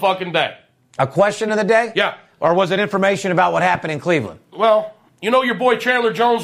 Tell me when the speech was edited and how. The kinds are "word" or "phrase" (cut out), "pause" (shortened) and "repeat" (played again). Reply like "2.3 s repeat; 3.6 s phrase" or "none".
none